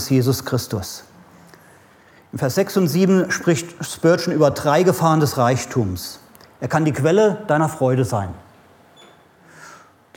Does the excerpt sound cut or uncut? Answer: uncut